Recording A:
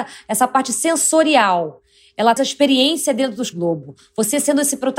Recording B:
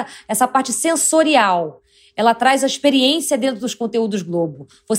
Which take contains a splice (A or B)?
A